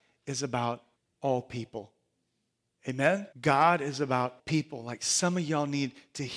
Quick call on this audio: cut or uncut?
cut